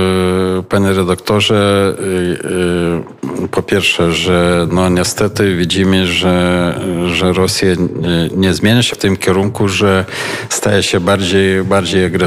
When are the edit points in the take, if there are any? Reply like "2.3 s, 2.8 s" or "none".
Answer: 8.9 s